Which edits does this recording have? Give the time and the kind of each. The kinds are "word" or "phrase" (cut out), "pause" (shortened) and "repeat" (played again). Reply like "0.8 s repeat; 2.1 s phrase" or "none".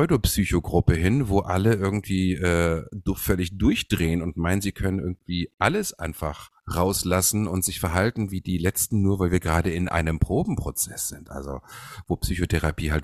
6.6 s pause